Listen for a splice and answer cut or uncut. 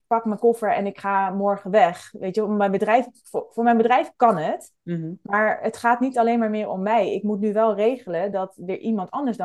uncut